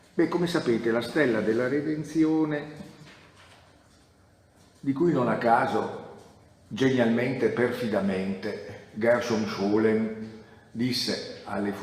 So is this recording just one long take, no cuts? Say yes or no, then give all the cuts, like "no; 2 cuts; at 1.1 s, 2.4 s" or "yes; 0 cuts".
yes; 0 cuts